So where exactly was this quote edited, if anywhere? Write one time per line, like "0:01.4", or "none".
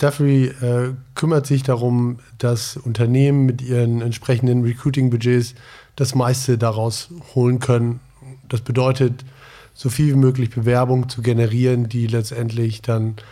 none